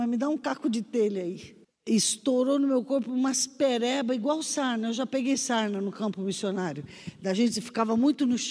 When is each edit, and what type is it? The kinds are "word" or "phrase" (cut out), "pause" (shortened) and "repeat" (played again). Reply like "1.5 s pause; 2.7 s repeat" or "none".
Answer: 1.6 s pause